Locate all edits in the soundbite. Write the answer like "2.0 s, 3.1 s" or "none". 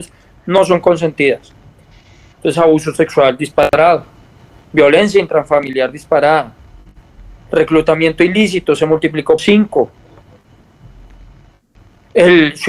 9.4 s